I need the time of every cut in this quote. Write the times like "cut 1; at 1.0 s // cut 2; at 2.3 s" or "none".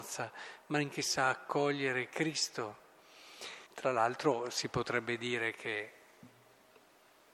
cut 1; at 0.9 s // cut 2; at 3.7 s